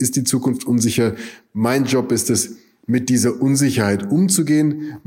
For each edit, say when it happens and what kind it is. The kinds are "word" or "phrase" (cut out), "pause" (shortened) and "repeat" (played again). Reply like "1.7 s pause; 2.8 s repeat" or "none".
none